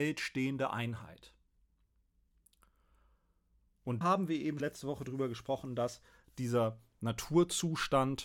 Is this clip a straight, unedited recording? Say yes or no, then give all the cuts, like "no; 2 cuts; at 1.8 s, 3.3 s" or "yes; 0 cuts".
no; 2 cuts; at 4.0 s, 4.6 s